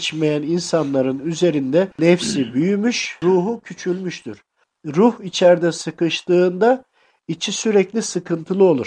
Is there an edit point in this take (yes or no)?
no